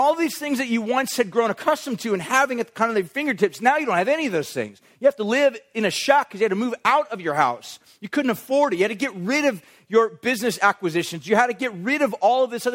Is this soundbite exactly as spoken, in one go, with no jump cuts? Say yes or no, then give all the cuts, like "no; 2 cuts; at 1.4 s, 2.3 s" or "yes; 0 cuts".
yes; 0 cuts